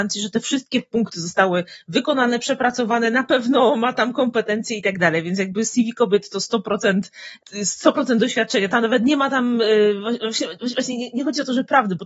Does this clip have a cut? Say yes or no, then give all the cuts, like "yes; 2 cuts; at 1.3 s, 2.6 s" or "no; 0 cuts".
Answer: no; 0 cuts